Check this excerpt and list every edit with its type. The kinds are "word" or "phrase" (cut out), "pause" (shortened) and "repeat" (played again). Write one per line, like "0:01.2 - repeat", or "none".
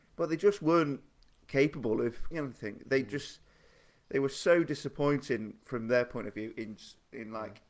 0:02.3 - word